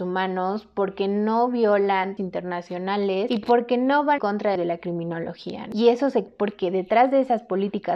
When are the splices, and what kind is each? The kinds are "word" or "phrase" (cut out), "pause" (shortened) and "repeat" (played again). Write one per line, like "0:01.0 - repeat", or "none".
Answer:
0:02.2 - word
0:04.2 - word
0:04.6 - phrase
0:06.3 - phrase